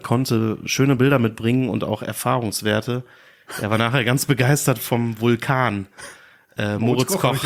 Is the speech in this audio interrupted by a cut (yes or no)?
no